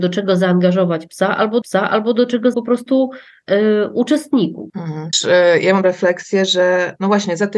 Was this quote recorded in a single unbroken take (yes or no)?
no